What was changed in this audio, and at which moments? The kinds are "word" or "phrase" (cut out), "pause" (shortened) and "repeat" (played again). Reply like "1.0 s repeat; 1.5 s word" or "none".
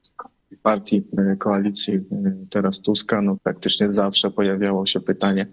3.4 s word